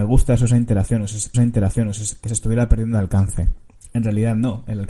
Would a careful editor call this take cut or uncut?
cut